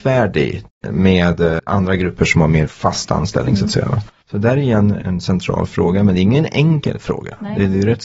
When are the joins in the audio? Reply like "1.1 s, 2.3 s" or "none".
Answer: none

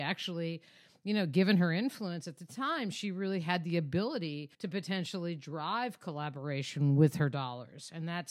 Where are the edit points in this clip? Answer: 4.5 s

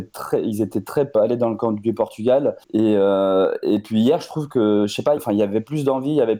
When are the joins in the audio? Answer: 1.1 s, 2.6 s, 5.2 s

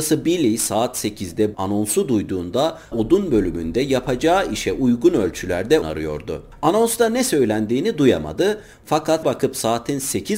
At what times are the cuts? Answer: 1.5 s, 2.9 s, 5.8 s, 9.2 s

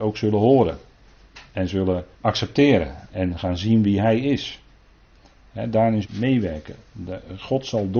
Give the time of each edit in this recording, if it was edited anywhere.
2.1 s, 6.0 s

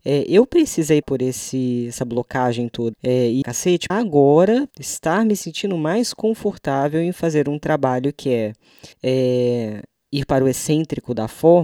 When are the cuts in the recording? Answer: 1.0 s, 2.9 s, 3.4 s, 3.9 s, 4.7 s, 8.9 s

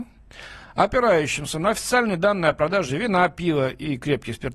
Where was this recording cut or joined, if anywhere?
none

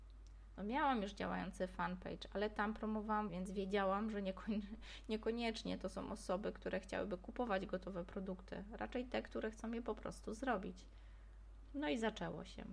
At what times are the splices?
3.3 s

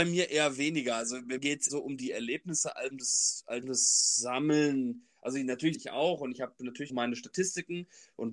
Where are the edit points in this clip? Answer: 1.4 s, 1.7 s, 2.9 s, 3.6 s, 5.7 s, 6.9 s

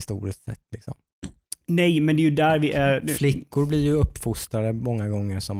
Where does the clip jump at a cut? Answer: none

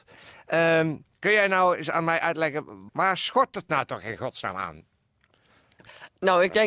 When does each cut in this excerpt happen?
1.1 s, 2.9 s

